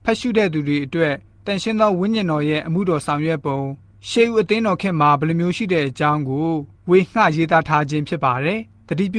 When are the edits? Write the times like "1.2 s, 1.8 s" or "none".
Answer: none